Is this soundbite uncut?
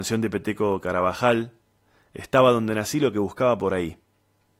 yes; 0 cuts

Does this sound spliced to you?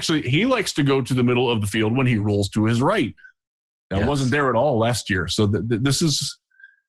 no; 0 cuts

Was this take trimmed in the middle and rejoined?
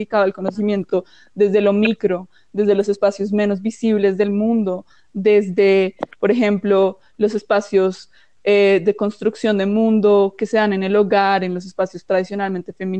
no; 0 cuts

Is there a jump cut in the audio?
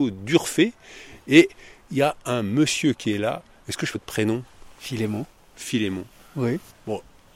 yes; 2 cuts; at 3.9 s, 4.7 s

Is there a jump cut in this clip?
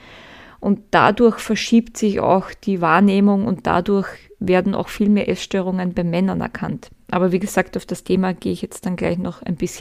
no; 0 cuts

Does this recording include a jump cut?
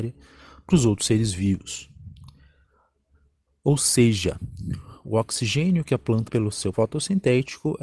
yes; 2 cuts; at 6.3 s, 6.7 s

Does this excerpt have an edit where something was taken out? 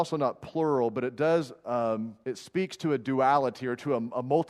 yes; 1 cut; at 2.2 s

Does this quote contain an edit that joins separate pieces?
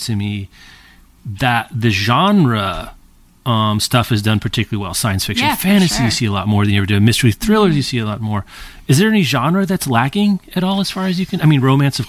no; 0 cuts

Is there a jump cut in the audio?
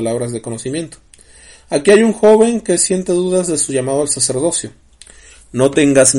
no; 0 cuts

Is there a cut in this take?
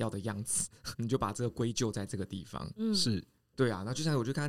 yes; 1 cut; at 0.9 s

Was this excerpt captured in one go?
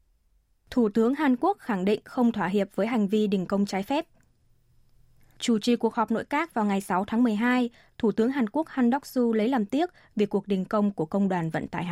yes; 0 cuts

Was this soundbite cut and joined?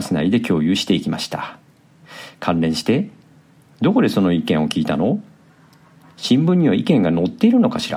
no; 0 cuts

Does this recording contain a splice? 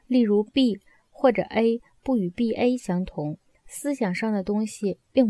no; 0 cuts

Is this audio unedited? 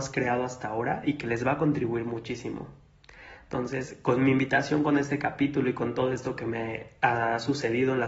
yes; 0 cuts

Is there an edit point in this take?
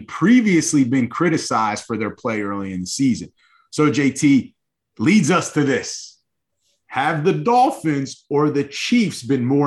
no; 0 cuts

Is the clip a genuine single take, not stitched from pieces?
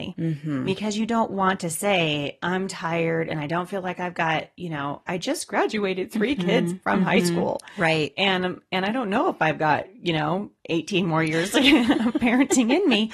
yes; 0 cuts

